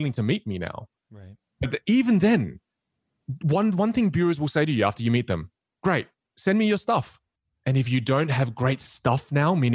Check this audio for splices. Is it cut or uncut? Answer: uncut